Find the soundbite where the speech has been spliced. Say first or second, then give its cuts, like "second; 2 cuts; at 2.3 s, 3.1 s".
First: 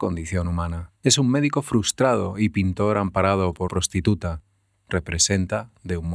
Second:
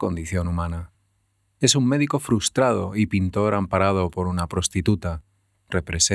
first; 2 cuts; at 1.0 s, 3.7 s